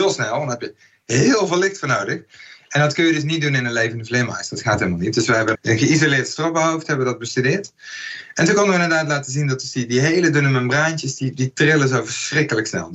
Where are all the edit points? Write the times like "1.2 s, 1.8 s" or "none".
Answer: 5.5 s